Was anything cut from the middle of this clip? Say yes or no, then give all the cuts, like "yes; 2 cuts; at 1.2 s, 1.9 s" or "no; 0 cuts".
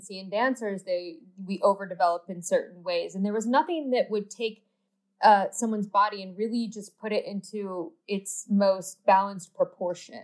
no; 0 cuts